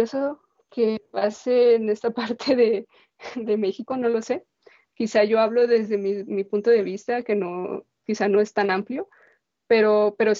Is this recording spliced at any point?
no; 0 cuts

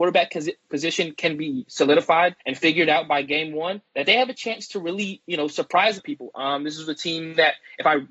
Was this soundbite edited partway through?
yes; 3 cuts; at 2.4 s, 3.9 s, 6.0 s

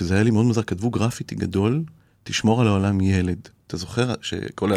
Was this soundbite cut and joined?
no; 0 cuts

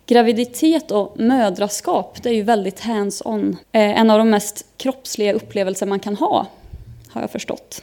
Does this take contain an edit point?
yes; 1 cut; at 3.6 s

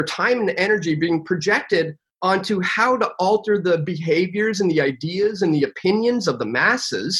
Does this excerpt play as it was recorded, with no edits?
yes; 0 cuts

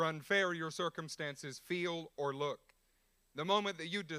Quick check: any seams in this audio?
no; 0 cuts

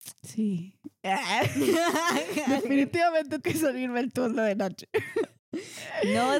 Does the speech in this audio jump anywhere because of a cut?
yes; 1 cut; at 3.4 s

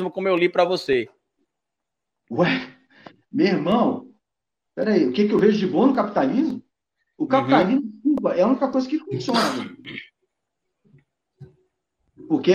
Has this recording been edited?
no; 0 cuts

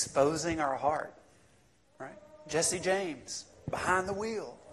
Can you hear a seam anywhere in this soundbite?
no; 0 cuts

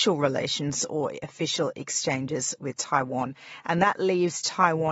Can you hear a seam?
no; 0 cuts

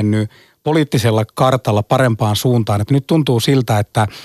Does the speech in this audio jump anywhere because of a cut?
no; 0 cuts

